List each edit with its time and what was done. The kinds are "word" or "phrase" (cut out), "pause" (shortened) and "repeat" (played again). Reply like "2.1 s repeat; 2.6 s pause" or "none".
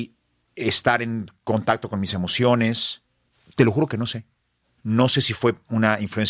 none